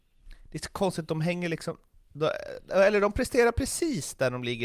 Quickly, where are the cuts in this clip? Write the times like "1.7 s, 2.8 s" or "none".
none